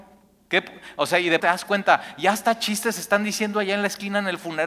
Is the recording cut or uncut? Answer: cut